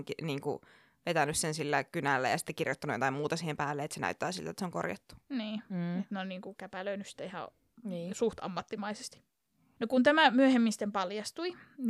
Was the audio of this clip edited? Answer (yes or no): no